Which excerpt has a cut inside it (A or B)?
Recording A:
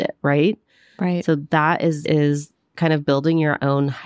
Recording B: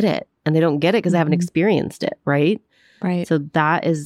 A